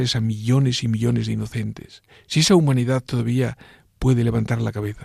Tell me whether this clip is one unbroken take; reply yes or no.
yes